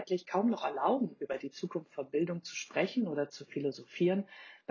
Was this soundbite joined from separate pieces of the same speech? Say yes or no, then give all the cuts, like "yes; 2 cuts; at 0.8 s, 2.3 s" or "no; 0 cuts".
no; 0 cuts